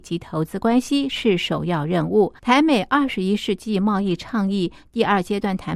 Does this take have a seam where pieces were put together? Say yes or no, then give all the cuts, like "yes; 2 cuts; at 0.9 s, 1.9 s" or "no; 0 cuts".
yes; 1 cut; at 2.4 s